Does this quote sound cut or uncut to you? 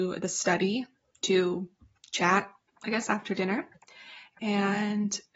uncut